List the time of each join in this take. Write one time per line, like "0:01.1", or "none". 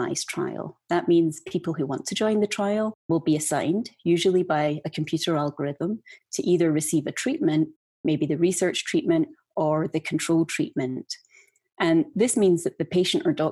none